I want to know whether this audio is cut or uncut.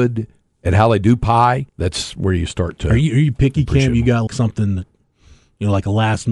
cut